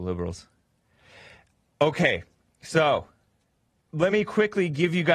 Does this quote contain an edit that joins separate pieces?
no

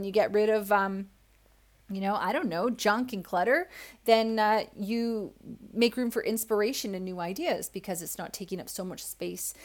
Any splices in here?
no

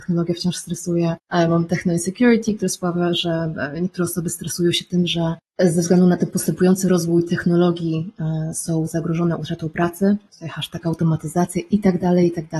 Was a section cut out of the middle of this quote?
no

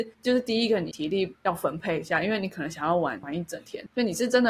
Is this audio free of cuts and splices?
yes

